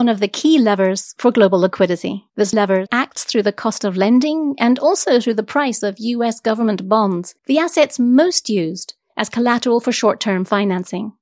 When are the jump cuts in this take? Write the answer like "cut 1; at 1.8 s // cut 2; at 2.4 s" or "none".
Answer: cut 1; at 2.3 s // cut 2; at 7.4 s